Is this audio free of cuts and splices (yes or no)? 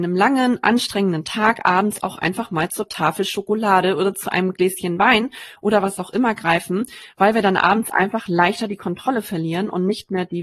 yes